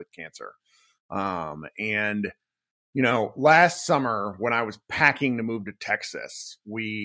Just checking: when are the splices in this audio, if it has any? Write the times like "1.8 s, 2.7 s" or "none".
none